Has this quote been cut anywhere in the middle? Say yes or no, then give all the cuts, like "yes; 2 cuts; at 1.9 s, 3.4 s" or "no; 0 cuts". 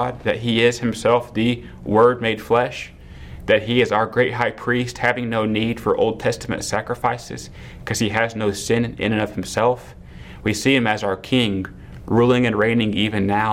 no; 0 cuts